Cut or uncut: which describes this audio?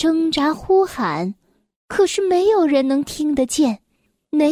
uncut